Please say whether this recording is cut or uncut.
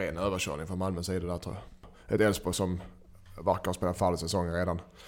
uncut